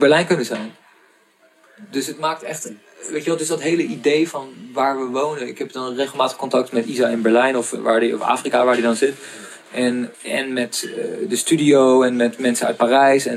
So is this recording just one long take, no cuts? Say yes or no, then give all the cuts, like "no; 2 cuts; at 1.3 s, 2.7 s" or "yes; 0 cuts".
no; 1 cut; at 10.1 s